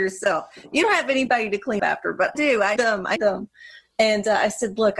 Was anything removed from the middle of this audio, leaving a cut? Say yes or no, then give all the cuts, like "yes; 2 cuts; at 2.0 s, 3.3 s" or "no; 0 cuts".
yes; 4 cuts; at 1.8 s, 2.3 s, 2.8 s, 3.2 s